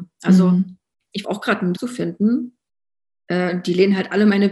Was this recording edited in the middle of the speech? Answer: yes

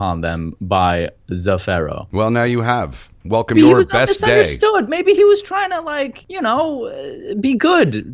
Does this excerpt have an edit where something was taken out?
yes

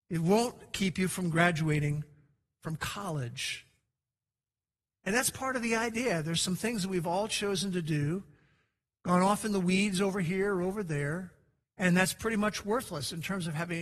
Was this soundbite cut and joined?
yes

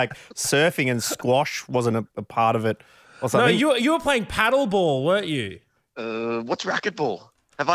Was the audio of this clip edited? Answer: no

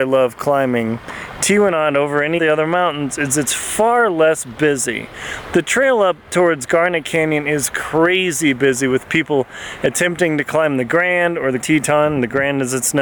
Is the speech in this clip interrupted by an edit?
yes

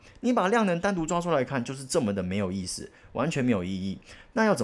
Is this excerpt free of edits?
yes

